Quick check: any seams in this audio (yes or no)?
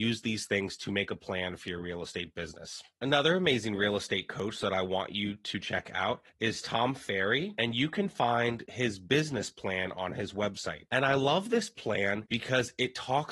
yes